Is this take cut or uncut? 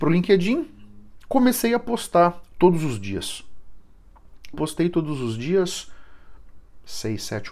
cut